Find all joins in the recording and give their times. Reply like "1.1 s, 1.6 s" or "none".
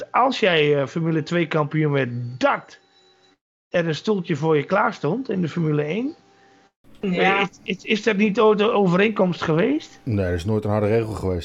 none

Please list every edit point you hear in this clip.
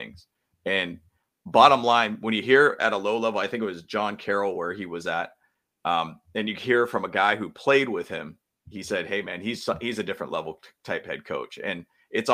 none

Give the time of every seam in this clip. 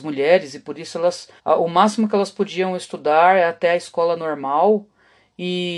1.4 s

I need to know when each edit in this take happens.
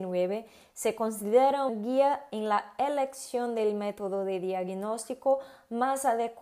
1.7 s

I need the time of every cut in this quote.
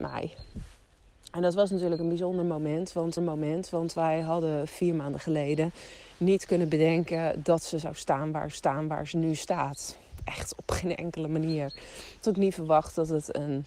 3.2 s, 8.5 s, 12.2 s

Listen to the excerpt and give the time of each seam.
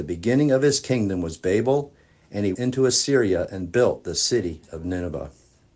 2.5 s

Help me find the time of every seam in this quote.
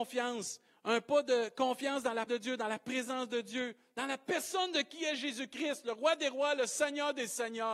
2.3 s

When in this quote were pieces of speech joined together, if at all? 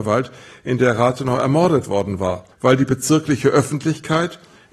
2.5 s

